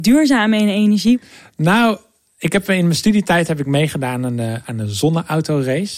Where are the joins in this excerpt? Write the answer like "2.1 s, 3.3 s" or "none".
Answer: none